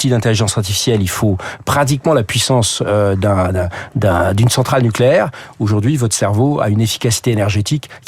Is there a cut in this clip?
no; 0 cuts

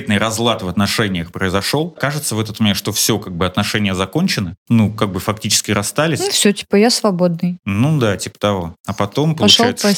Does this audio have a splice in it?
yes; 1 cut; at 8.8 s

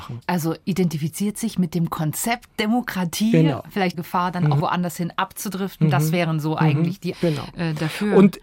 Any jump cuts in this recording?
yes; 3 cuts; at 3.9 s, 4.6 s, 7.1 s

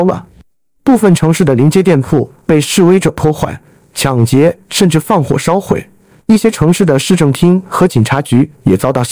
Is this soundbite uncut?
yes; 0 cuts

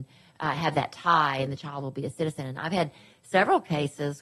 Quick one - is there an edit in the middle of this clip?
no; 0 cuts

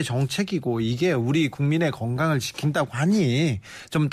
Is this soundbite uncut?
yes; 0 cuts

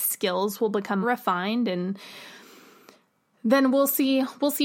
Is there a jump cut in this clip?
yes; 1 cut; at 1.0 s

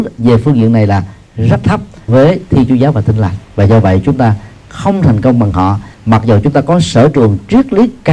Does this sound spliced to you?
yes; 3 cuts; at 2.1 s, 3.4 s, 5.9 s

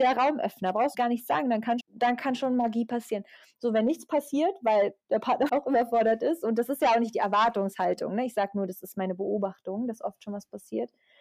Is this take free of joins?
no; 3 cuts; at 0.9 s, 1.8 s, 5.5 s

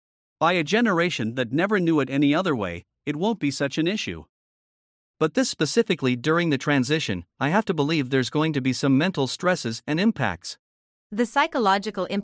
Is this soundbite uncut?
yes; 0 cuts

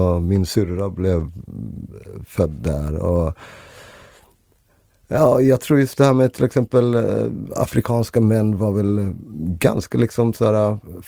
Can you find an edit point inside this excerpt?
no; 0 cuts

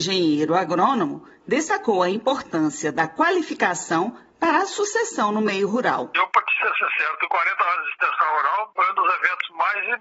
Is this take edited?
no; 0 cuts

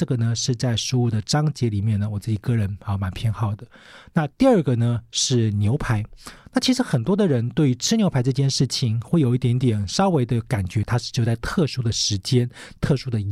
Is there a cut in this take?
no; 0 cuts

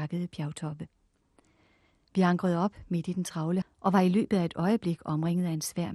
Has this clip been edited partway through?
yes; 1 cut; at 3.6 s

